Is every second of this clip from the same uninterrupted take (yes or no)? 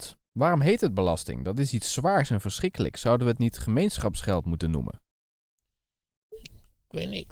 yes